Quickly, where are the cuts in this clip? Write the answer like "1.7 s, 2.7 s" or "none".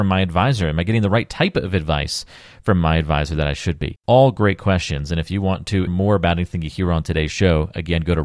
4.0 s, 5.9 s

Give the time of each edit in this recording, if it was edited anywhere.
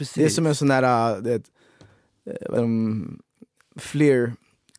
2.6 s

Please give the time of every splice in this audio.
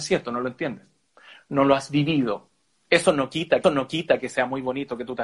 3.6 s

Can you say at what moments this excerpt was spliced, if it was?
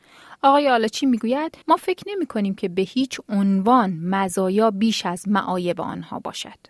1.6 s

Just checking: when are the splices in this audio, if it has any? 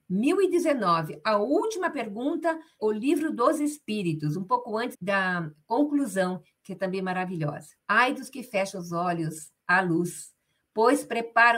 2.8 s, 4.9 s, 7.8 s, 9.6 s

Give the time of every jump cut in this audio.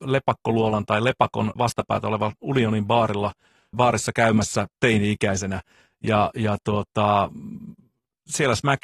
1.6 s, 3.7 s, 4.7 s

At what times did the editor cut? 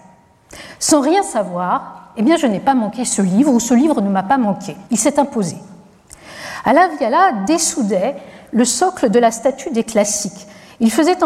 4.9 s

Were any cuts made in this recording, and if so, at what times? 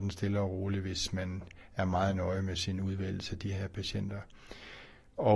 none

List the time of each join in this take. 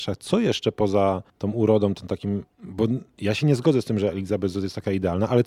1.3 s, 2.5 s

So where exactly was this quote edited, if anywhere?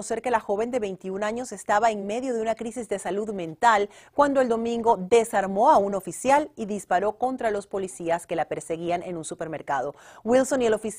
none

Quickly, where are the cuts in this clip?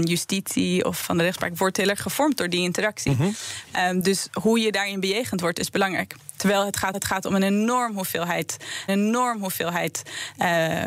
1.0 s, 6.9 s, 8.9 s

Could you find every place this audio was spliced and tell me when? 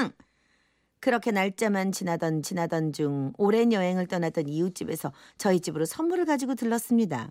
2.4 s

